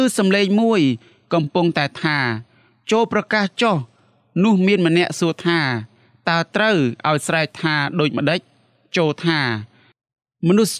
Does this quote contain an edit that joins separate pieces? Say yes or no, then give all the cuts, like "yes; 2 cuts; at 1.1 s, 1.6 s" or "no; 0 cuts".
no; 0 cuts